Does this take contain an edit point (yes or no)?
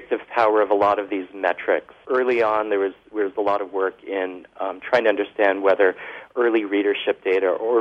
no